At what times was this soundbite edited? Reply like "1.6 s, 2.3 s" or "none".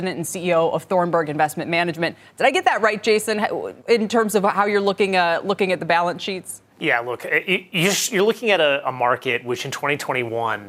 3.8 s, 6.7 s